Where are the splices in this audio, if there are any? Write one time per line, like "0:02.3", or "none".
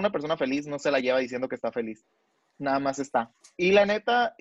none